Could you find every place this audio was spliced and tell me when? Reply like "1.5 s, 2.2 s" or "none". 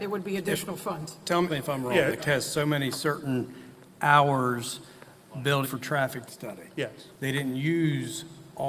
1.5 s, 2.2 s, 5.6 s, 6.3 s